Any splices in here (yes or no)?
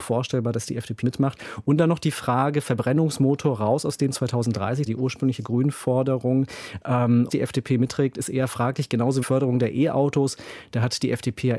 yes